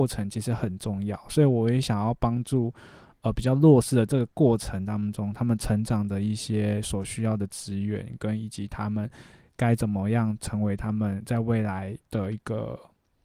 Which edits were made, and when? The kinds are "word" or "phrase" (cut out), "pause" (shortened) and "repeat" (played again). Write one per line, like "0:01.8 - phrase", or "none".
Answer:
0:12.0 - pause